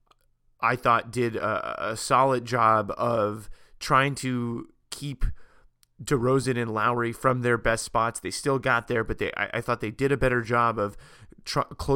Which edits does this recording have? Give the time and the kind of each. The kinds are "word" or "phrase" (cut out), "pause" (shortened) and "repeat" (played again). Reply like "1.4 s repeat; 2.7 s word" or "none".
none